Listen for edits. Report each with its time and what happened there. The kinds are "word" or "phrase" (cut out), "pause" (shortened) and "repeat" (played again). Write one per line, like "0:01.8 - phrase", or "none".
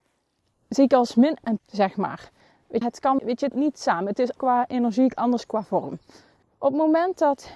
0:01.6 - word
0:02.8 - word
0:03.2 - word
0:03.5 - word
0:04.4 - word
0:06.4 - pause